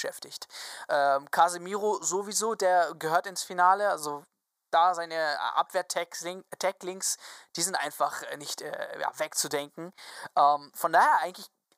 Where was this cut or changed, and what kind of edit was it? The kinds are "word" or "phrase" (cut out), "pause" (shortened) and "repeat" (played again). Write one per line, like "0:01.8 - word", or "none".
none